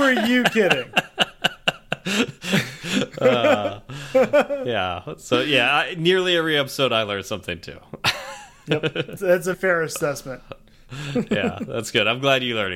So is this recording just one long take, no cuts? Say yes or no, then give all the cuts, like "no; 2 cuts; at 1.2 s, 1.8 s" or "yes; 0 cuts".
no; 2 cuts; at 9.2 s, 9.5 s